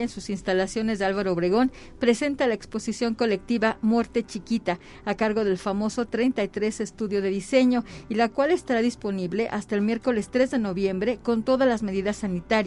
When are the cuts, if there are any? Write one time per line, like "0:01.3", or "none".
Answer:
none